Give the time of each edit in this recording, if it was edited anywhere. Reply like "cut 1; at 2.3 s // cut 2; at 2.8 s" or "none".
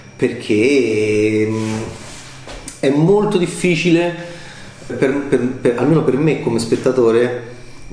cut 1; at 4.9 s